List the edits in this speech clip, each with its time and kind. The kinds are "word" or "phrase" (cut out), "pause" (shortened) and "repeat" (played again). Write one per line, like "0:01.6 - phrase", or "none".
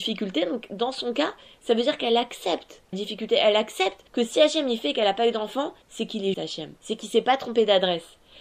0:02.9 - word
0:04.1 - pause
0:05.8 - pause
0:06.3 - word
0:06.8 - pause